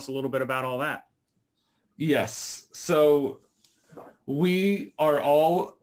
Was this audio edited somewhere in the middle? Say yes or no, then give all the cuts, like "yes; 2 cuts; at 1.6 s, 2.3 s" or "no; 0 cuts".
no; 0 cuts